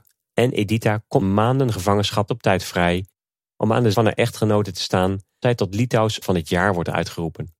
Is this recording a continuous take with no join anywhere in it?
no; 5 cuts; at 1.2 s, 2.3 s, 3.9 s, 5.4 s, 6.2 s

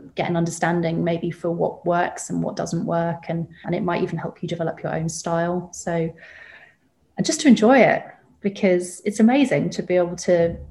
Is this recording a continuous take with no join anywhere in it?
no; 1 cut; at 3.6 s

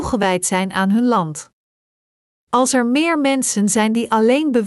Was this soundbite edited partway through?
no; 0 cuts

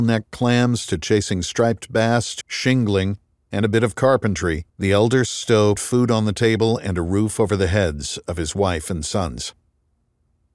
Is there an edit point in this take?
yes; 3 cuts; at 2.4 s, 4.7 s, 5.8 s

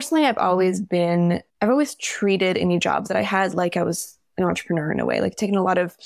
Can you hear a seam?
yes; 1 cut; at 1.5 s

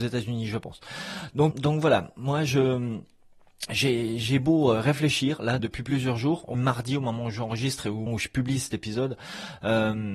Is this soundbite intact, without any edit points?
no; 4 cuts; at 1.5 s, 5.6 s, 6.5 s, 8.1 s

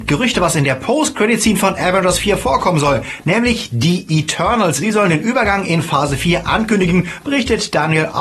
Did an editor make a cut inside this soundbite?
no; 0 cuts

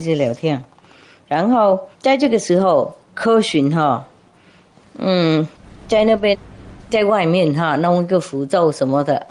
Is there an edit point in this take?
yes; 2 cuts; at 1.9 s, 5.6 s

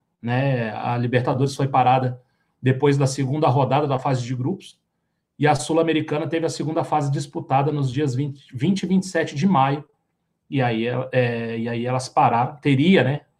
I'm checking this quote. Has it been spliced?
no; 0 cuts

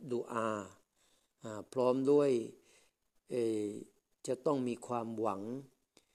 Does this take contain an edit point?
no; 0 cuts

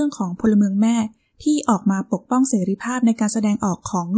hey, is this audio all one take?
yes; 0 cuts

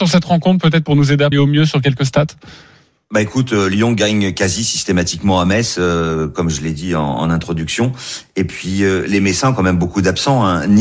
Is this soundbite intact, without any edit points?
no; 1 cut; at 1.3 s

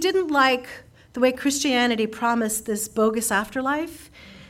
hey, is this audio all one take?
yes; 0 cuts

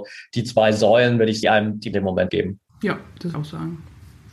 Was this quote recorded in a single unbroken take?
no; 5 cuts; at 1.4 s, 1.9 s, 2.3 s, 2.7 s, 3.3 s

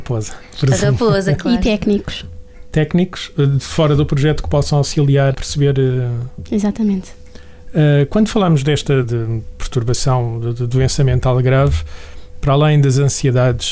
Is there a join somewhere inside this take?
yes; 2 cuts; at 5.3 s, 9.0 s

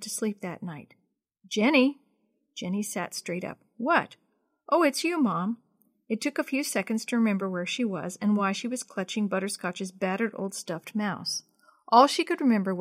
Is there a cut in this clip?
no; 0 cuts

